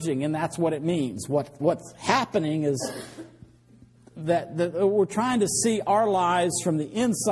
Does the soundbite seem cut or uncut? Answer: uncut